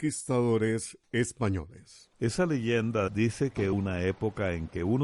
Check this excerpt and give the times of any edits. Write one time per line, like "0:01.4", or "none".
0:03.1
0:03.7